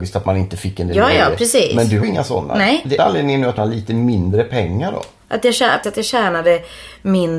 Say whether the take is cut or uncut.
cut